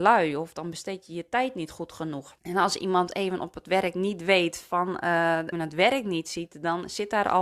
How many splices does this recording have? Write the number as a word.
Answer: two